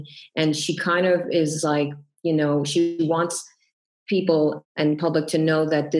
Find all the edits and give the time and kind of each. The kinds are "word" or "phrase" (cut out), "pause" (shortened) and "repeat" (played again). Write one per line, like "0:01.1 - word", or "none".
none